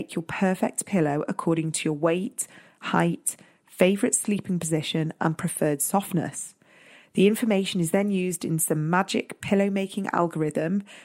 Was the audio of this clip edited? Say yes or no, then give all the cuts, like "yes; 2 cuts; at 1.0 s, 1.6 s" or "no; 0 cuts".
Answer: no; 0 cuts